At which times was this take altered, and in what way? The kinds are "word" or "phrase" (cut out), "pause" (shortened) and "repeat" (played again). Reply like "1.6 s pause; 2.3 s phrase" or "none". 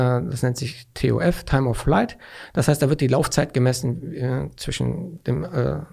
none